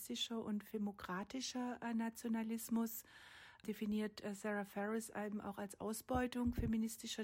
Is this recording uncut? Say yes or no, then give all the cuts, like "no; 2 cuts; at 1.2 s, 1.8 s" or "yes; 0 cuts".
yes; 0 cuts